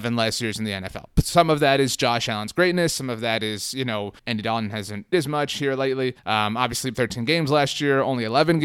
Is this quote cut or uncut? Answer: cut